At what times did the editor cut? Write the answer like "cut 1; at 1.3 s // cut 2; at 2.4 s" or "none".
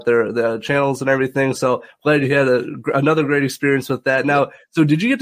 none